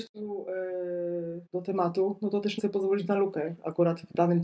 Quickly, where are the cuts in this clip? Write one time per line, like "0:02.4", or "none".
0:01.5
0:02.6